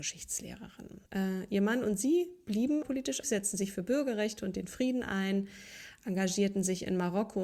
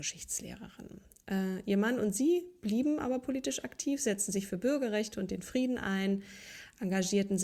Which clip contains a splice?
first; 3 cuts; at 1.1 s, 2.8 s, 3.2 s

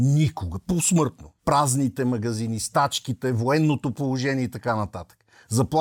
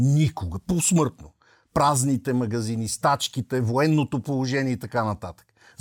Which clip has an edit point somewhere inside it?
first; 1 cut; at 1.4 s

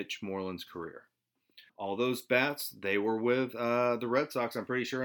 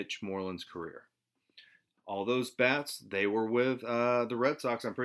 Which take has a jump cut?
first; 1 cut; at 1.7 s

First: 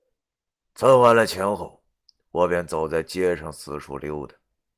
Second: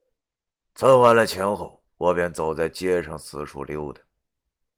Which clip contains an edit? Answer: second; 1 cut; at 1.9 s

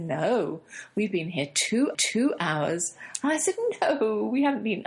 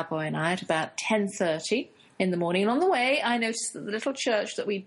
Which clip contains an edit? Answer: first; 1 cut; at 1.9 s

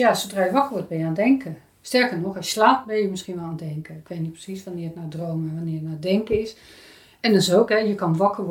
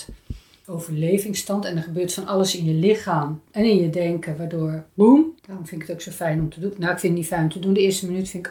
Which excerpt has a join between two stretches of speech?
second; 1 cut; at 5.4 s

